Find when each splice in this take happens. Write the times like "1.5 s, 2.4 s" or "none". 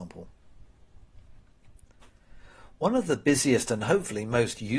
none